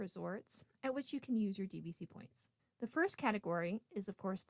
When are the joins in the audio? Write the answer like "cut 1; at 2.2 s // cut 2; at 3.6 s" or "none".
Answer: cut 1; at 2.6 s